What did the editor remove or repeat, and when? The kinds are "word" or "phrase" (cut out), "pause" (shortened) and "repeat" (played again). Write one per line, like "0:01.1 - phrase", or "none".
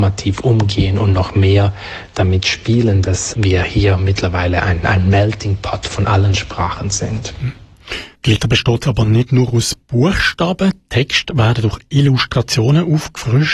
0:08.1 - pause